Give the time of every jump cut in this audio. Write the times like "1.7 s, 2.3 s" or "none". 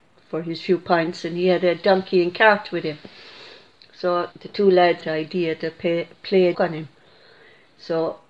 4.3 s, 5.0 s, 6.5 s

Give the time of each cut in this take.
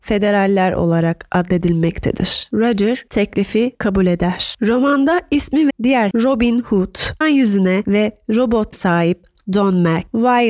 5.7 s, 6.1 s, 7.2 s, 8.7 s

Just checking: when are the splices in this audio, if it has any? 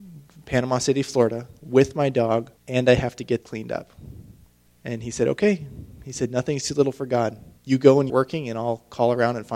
2.6 s, 3.4 s, 4.7 s, 7.6 s, 8.1 s

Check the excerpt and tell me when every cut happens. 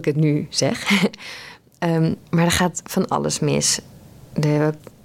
2.3 s

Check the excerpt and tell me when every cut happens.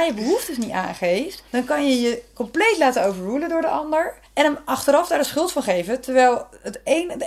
1.5 s, 4.3 s

